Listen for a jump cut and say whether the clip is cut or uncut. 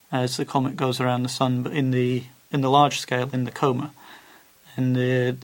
uncut